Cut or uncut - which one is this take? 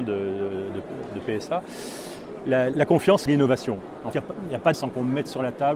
cut